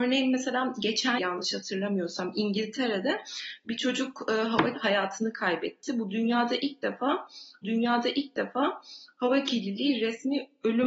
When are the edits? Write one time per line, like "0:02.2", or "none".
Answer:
0:01.2
0:04.7
0:07.6